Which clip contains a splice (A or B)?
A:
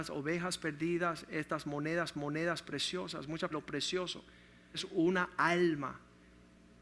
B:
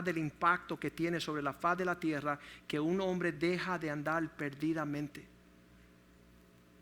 A